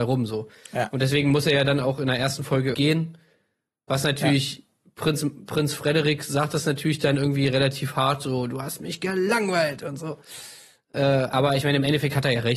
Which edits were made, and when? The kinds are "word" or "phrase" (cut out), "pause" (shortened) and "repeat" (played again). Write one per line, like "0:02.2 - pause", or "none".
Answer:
0:02.7 - word

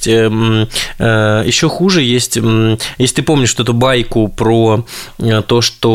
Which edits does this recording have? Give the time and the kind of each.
none

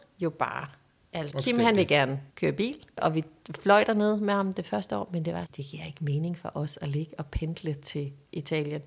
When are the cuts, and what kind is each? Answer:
0:01.3 - word
0:05.5 - word

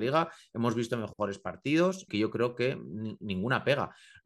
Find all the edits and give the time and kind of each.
0:02.1 - word

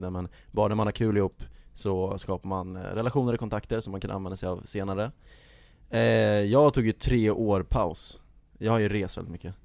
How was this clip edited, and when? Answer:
none

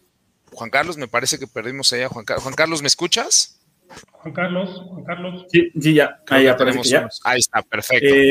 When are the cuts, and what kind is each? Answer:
0:04.0 - pause

